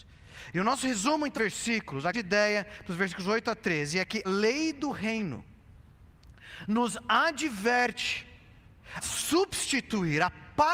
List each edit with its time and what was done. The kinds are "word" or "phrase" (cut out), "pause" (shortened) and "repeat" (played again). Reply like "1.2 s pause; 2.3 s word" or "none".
1.3 s word; 2.1 s word; 4.2 s word; 9.0 s word

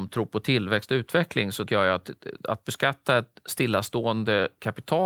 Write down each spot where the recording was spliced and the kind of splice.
1.7 s word

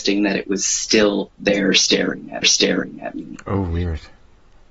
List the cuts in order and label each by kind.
2.4 s repeat

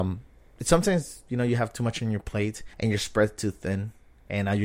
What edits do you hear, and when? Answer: 2.7 s pause

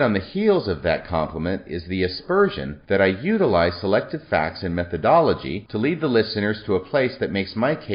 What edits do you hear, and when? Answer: none

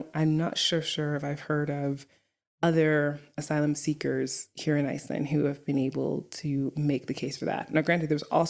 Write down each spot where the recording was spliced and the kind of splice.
none

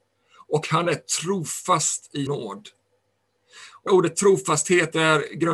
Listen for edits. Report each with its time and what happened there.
2.3 s word; 3.9 s phrase

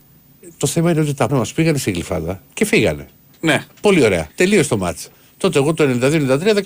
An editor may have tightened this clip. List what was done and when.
1.3 s word; 2.5 s pause; 3.7 s pause; 4.3 s pause; 5.1 s pause

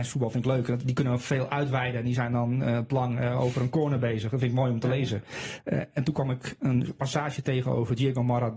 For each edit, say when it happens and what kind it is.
2.9 s word

